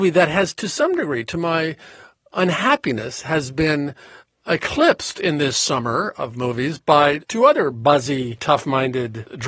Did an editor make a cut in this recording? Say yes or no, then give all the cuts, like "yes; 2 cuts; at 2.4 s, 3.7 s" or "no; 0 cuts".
no; 0 cuts